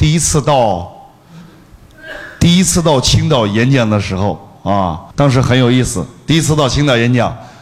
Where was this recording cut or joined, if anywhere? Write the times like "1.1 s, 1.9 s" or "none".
5.1 s